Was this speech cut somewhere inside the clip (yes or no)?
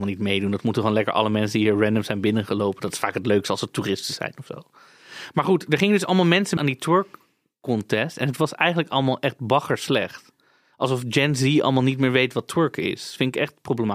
yes